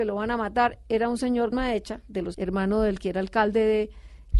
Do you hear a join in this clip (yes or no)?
yes